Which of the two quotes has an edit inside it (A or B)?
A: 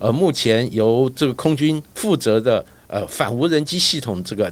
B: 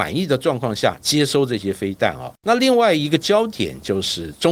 B